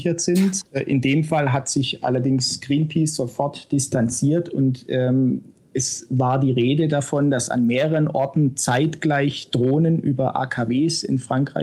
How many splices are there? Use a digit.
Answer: 0